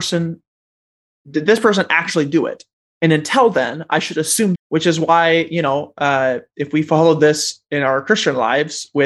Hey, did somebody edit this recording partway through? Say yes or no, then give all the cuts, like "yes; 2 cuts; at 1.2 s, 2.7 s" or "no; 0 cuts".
yes; 1 cut; at 4.6 s